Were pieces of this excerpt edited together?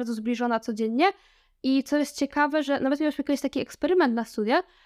no; 0 cuts

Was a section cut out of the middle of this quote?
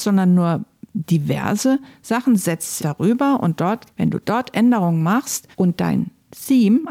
yes; 3 cuts; at 2.8 s, 3.9 s, 5.5 s

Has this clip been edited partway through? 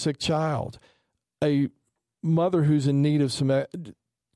no; 0 cuts

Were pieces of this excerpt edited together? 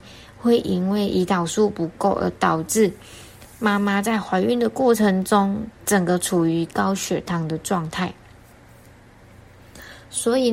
yes; 1 cut; at 5.8 s

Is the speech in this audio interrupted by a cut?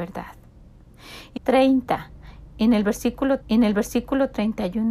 yes; 2 cuts; at 1.4 s, 3.4 s

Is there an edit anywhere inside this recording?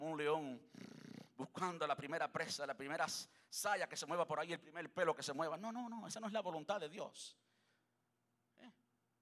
no; 0 cuts

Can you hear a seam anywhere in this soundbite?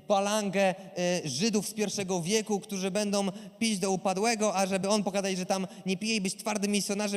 no; 0 cuts

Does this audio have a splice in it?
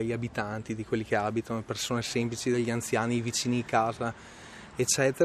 no; 0 cuts

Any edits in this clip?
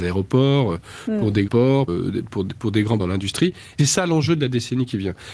yes; 4 cuts; at 1.5 s, 1.9 s, 3.0 s, 3.8 s

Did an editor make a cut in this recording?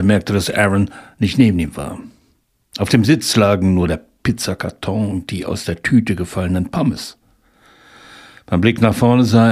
no; 0 cuts

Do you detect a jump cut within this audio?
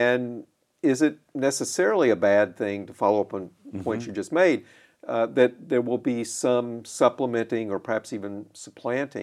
no; 0 cuts

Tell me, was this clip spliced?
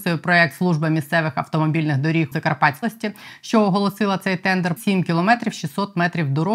yes; 3 cuts; at 2.3 s, 2.8 s, 4.8 s

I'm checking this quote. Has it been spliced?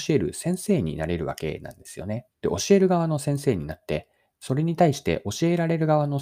yes; 1 cut; at 2.3 s

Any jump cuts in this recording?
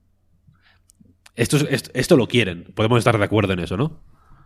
no; 0 cuts

